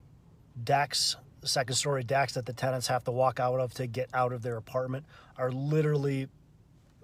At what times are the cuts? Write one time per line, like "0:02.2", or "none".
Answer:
none